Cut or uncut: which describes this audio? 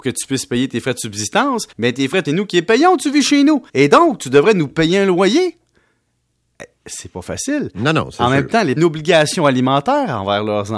cut